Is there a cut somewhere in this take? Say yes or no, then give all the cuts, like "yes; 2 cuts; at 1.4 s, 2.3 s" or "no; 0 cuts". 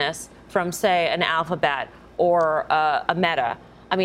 no; 0 cuts